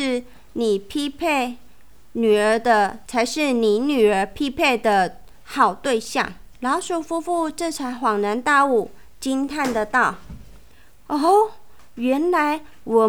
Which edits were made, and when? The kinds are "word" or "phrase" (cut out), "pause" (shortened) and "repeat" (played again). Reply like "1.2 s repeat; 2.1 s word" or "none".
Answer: 3.1 s word; 6.5 s pause

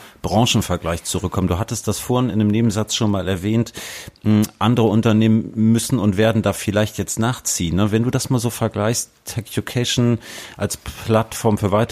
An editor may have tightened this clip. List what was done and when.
none

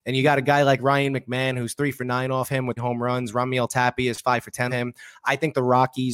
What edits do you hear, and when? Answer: 2.8 s word; 4.7 s word

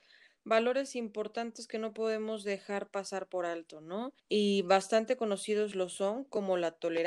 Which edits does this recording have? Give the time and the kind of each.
4.2 s pause

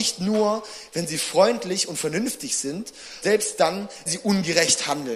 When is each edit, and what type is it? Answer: 3.2 s word; 4.1 s word

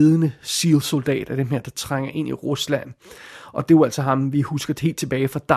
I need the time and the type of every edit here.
none

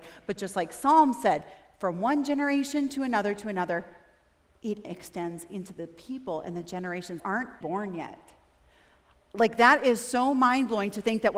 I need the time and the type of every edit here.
4.8 s word; 7.2 s word; 7.6 s word

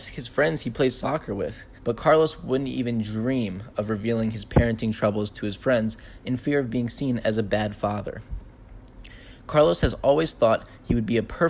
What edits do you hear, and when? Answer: 1.8 s pause

